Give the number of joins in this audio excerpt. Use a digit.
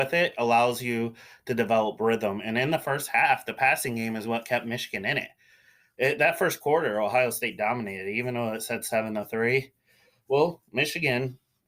0